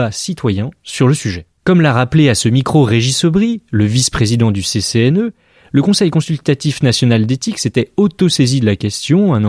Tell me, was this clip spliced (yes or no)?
yes